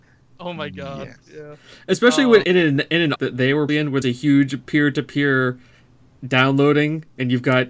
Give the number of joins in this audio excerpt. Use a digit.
4